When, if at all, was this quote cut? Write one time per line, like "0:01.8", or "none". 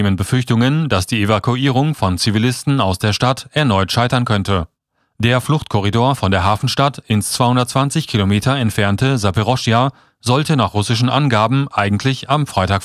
none